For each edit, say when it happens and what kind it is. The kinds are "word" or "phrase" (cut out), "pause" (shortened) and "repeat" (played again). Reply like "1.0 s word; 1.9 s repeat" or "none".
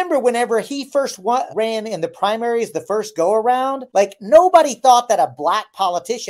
1.5 s word; 3.9 s pause